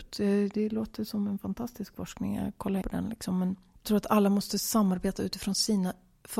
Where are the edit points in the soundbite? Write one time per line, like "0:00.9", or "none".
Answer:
0:02.8
0:03.8

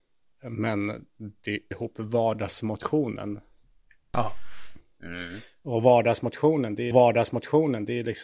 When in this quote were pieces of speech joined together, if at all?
0:01.7
0:06.9

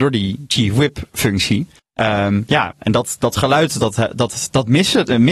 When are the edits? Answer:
0:01.8

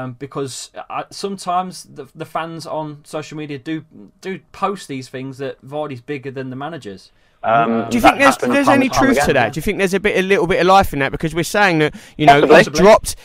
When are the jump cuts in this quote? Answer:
none

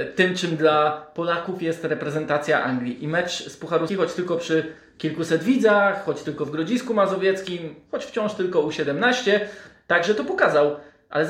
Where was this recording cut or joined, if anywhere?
0:03.9

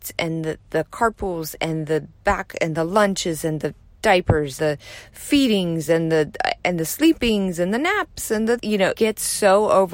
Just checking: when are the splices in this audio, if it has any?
0:04.6
0:08.6
0:08.9

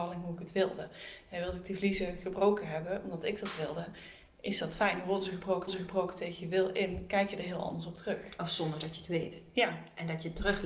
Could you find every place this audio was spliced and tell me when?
0:05.7

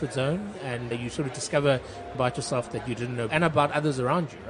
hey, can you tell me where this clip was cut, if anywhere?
0:00.9
0:02.1
0:03.3

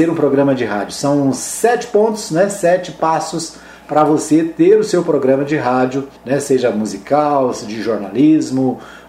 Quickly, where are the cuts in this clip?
0:06.2

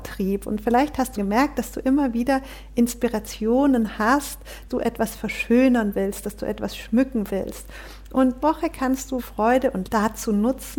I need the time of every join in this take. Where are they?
0:01.2
0:04.7
0:08.4
0:09.2
0:09.8

